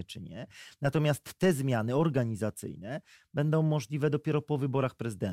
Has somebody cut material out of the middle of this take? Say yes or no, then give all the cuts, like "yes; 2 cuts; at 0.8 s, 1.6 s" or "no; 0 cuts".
no; 0 cuts